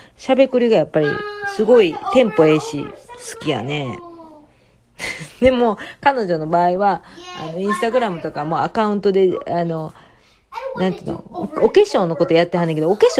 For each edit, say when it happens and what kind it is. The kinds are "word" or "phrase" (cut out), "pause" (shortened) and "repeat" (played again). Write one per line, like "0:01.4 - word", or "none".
none